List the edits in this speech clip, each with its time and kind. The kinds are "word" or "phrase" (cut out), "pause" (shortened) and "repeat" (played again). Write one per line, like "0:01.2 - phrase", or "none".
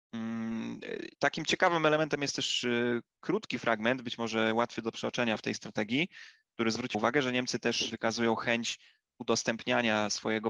0:06.9 - word
0:07.9 - word